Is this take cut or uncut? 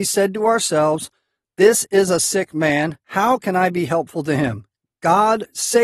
uncut